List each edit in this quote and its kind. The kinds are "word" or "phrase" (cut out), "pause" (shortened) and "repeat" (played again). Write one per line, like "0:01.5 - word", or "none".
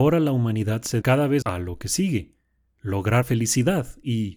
0:01.0 - word
0:01.4 - word
0:03.2 - word